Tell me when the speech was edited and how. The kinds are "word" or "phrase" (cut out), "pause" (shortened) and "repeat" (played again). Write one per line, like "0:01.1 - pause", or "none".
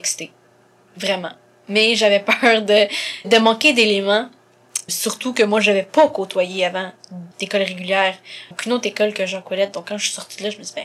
0:03.2 - word
0:04.9 - word
0:07.3 - word
0:08.5 - word